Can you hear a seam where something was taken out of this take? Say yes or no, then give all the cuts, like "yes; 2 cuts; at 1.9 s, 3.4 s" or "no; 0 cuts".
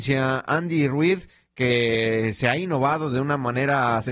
no; 0 cuts